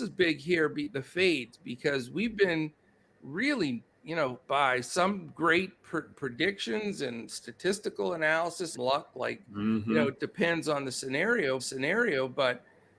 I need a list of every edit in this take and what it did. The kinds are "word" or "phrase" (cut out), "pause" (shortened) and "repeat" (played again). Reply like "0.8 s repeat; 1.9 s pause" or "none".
3.9 s pause; 4.4 s pause; 8.7 s phrase; 10.2 s word; 11.6 s repeat